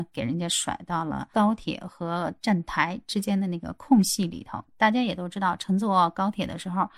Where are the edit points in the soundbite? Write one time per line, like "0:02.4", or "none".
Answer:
none

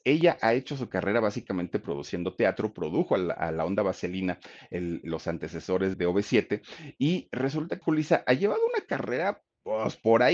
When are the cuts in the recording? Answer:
0:05.9
0:07.8

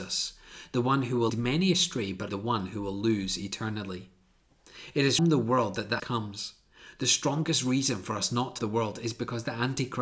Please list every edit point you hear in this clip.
0:01.3
0:02.3
0:05.2
0:06.0
0:08.6

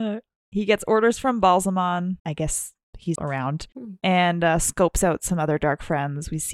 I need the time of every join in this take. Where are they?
0:03.2

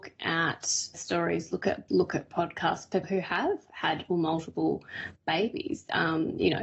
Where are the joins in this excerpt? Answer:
0:00.9
0:01.9
0:03.0
0:04.1

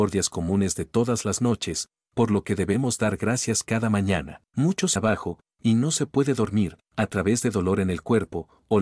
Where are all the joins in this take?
0:04.5
0:05.0

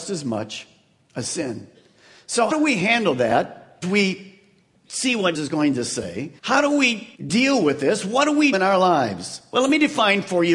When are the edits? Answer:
0:02.5
0:03.8
0:05.3
0:06.4
0:07.1
0:08.5

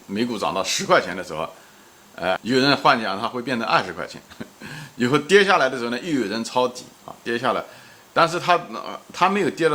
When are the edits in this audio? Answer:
0:02.4

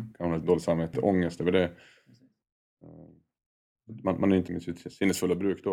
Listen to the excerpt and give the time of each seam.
0:00.9
0:04.5

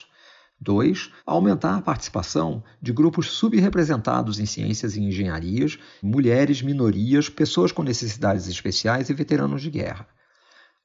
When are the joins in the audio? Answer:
0:01.2
0:06.0

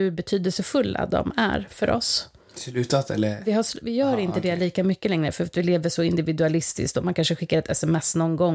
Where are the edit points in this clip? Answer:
none

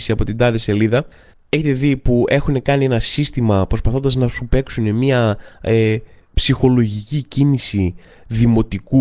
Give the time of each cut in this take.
none

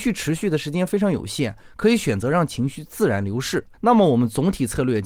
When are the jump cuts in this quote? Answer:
0:03.7

